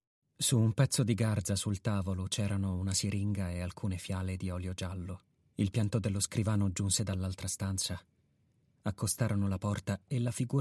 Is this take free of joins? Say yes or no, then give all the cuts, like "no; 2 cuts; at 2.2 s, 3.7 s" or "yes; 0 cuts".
yes; 0 cuts